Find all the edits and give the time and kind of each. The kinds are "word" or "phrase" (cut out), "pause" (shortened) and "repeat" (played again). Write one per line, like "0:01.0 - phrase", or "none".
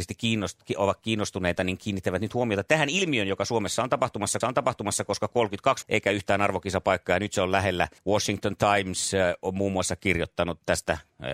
0:04.4 - repeat
0:05.8 - word
0:08.0 - pause